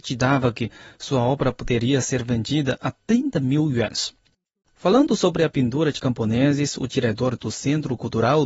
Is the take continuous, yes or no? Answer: yes